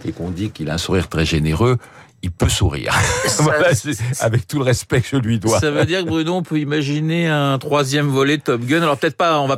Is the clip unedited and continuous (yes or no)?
yes